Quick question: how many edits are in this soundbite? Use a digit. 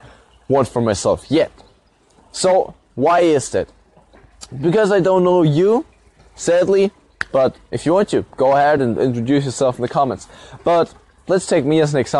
0